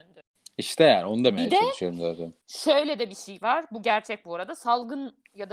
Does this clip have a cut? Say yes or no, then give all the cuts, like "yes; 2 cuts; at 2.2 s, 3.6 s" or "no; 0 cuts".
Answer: yes; 1 cut; at 2.4 s